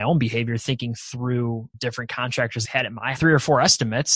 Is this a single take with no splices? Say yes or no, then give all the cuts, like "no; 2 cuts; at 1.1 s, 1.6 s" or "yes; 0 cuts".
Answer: no; 3 cuts; at 1.7 s, 2.6 s, 3.1 s